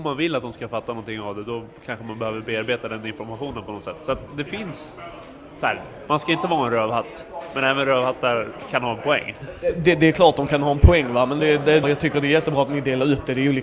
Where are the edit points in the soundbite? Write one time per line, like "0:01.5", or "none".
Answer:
0:11.4
0:11.8